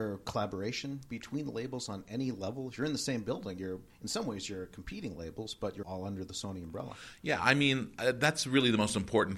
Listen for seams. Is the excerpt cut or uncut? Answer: cut